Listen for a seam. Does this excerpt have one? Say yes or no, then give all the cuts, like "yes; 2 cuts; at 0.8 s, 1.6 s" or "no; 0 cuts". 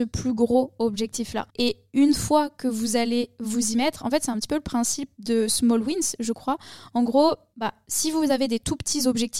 yes; 1 cut; at 1.5 s